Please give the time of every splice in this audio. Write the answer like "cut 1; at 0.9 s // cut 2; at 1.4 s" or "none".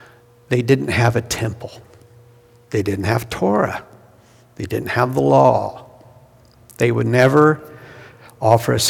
none